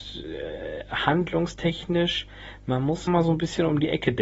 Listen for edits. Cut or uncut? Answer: cut